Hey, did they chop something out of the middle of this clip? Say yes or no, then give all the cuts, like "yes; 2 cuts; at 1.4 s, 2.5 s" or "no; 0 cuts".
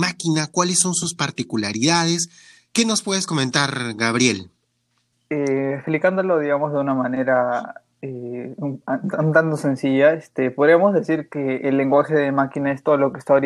no; 0 cuts